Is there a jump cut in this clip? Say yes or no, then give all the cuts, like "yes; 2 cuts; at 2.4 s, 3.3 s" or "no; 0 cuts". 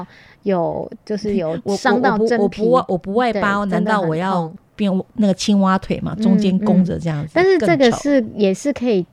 no; 0 cuts